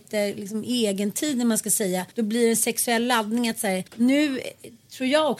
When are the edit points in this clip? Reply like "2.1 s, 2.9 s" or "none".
2.1 s, 3.9 s